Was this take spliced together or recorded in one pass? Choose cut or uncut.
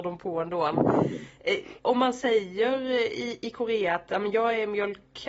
uncut